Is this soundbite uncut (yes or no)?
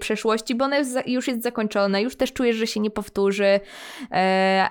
yes